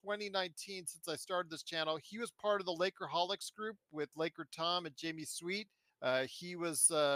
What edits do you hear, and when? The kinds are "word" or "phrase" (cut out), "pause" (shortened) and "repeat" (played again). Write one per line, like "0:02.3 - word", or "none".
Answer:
0:05.9 - pause